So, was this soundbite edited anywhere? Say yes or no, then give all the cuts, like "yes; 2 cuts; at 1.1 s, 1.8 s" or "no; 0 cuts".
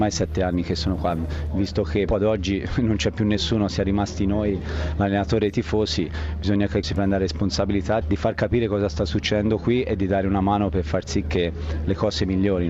yes; 3 cuts; at 2.1 s, 6.8 s, 8.0 s